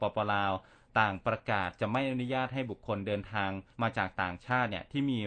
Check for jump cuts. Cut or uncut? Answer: cut